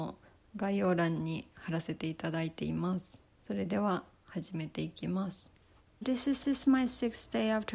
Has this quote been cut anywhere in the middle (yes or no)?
yes